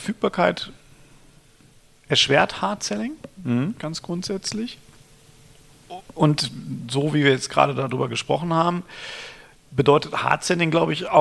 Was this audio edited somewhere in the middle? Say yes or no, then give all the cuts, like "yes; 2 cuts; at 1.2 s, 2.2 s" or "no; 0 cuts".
no; 0 cuts